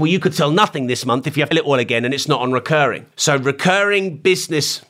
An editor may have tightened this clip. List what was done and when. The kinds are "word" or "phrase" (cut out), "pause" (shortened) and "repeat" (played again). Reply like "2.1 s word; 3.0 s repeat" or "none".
1.5 s word; 3.1 s pause